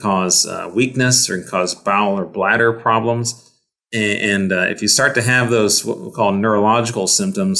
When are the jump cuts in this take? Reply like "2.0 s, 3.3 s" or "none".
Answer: none